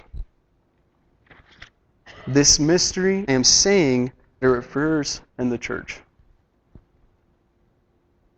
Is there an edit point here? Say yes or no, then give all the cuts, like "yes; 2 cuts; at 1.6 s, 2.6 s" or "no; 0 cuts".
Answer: yes; 4 cuts; at 2.0 s, 3.3 s, 4.4 s, 5.3 s